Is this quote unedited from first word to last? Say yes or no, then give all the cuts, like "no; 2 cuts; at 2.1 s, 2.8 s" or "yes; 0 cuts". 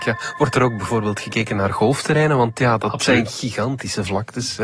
yes; 0 cuts